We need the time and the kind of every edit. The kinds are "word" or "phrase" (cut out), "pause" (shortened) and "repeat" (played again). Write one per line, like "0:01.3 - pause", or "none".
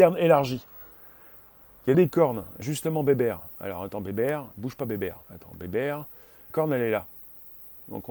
0:01.9 - phrase
0:02.6 - word
0:05.2 - pause
0:06.5 - word